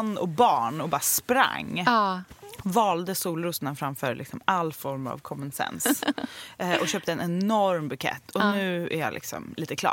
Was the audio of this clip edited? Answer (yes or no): no